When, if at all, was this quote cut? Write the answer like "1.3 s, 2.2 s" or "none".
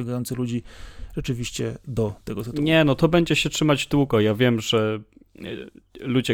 none